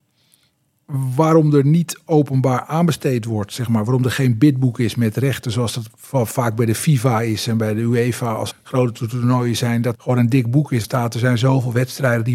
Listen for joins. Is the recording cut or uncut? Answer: cut